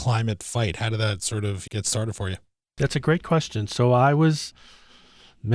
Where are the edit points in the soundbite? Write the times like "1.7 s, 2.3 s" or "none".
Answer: 1.7 s